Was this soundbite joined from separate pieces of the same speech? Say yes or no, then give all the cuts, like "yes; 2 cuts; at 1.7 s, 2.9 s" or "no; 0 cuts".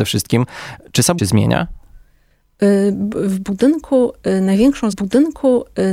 yes; 2 cuts; at 1.2 s, 4.9 s